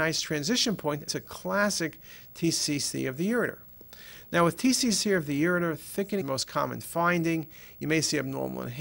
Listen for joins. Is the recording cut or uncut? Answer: cut